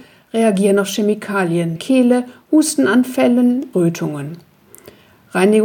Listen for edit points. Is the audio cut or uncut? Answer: cut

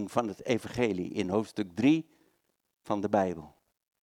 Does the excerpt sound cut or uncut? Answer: uncut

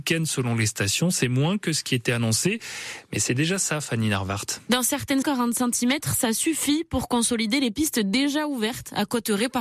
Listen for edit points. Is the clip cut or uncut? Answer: cut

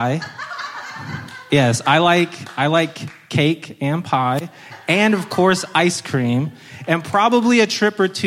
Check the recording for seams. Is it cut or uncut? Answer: uncut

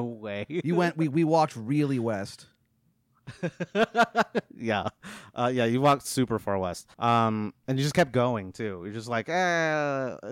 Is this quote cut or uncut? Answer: cut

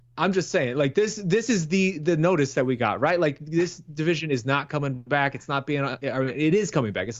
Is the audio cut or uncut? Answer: uncut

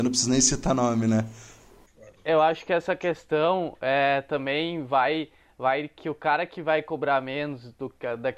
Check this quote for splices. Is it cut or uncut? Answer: uncut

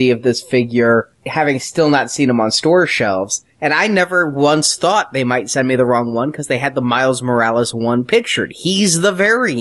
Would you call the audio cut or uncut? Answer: uncut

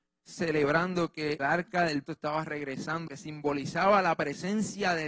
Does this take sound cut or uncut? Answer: cut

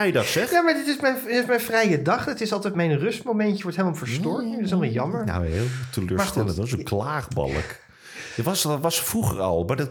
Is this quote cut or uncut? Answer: cut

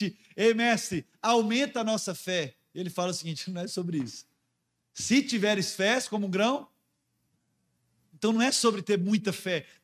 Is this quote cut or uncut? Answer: uncut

